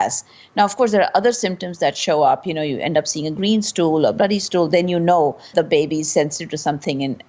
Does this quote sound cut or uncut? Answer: cut